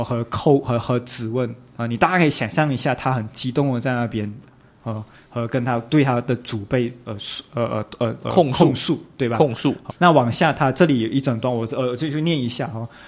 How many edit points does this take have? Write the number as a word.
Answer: one